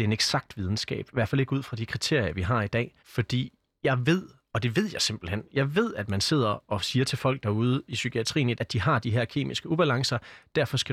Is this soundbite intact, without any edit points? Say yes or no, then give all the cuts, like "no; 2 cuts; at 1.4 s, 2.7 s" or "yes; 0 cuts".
no; 2 cuts; at 3.0 s, 8.5 s